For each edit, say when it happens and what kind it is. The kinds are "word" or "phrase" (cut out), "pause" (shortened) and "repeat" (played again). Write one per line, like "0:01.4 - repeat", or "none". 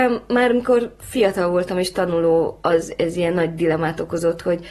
none